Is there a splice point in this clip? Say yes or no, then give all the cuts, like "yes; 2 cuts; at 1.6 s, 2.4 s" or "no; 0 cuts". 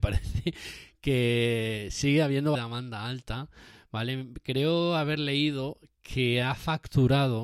yes; 1 cut; at 2.6 s